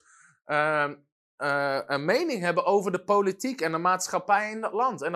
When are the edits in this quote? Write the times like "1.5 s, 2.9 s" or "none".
none